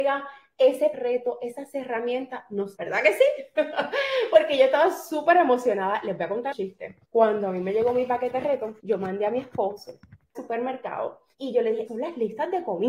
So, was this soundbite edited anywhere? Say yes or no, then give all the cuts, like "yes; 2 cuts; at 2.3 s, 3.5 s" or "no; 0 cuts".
yes; 8 cuts; at 0.9 s, 2.7 s, 6.5 s, 7.0 s, 8.8 s, 10.3 s, 11.3 s, 11.9 s